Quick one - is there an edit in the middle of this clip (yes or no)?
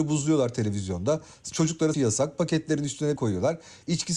yes